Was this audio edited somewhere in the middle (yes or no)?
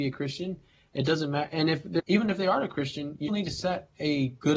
yes